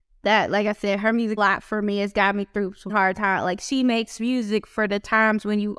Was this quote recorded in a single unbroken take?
no; 2 cuts; at 1.4 s, 2.9 s

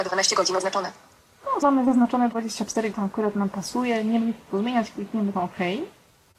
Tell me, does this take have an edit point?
yes; 4 cuts; at 1.6 s, 2.9 s, 4.2 s, 5.3 s

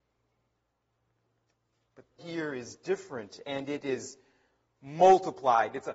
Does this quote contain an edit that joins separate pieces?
yes; 1 cut; at 2.2 s

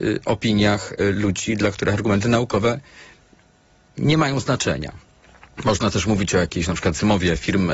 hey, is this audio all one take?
yes; 0 cuts

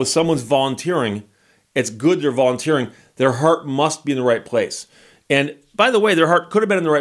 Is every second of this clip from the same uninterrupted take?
yes; 0 cuts

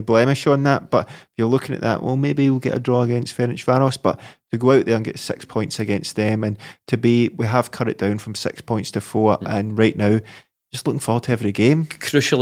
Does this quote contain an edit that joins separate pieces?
no; 0 cuts

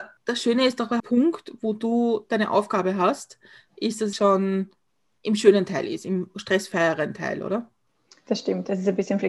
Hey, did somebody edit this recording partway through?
yes; 2 cuts; at 1.0 s, 4.1 s

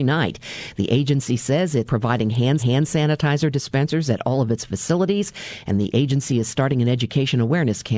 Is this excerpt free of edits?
no; 2 cuts; at 1.8 s, 2.6 s

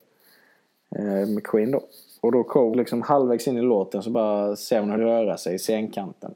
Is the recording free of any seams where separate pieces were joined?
no; 2 cuts; at 2.7 s, 5.0 s

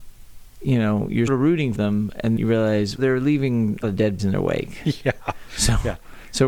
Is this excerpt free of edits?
no; 6 cuts; at 1.3 s, 1.7 s, 2.4 s, 3.0 s, 3.8 s, 4.2 s

